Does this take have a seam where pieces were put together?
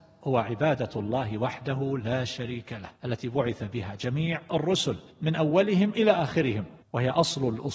yes; 3 cuts; at 3.0 s, 5.1 s, 6.8 s

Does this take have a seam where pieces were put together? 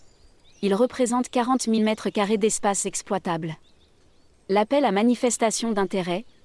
no; 0 cuts

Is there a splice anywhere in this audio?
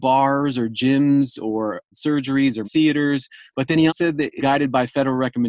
yes; 4 cuts; at 1.9 s, 2.6 s, 3.9 s, 4.4 s

